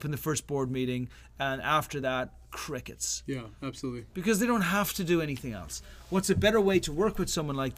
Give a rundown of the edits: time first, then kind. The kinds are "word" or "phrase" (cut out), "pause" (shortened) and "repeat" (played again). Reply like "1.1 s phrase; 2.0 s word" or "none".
none